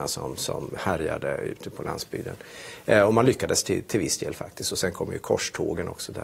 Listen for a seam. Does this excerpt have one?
no; 0 cuts

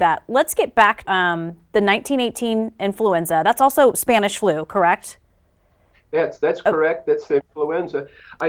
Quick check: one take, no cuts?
no; 1 cut; at 1.0 s

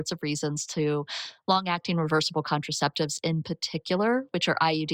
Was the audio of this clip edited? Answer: no; 0 cuts

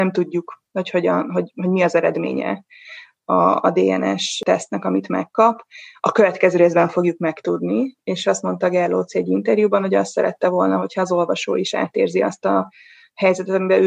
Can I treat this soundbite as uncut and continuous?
yes; 0 cuts

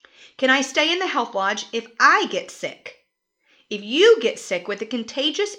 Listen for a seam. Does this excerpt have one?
no; 0 cuts

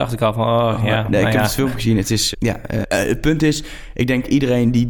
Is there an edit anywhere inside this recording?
yes; 2 cuts; at 2.3 s, 2.8 s

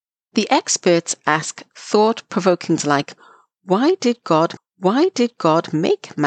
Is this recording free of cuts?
no; 2 cuts; at 2.8 s, 4.6 s

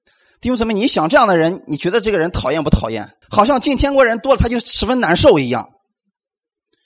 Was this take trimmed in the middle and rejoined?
yes; 1 cut; at 3.2 s

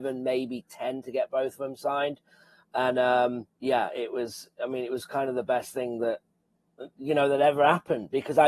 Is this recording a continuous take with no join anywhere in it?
no; 1 cut; at 3.5 s

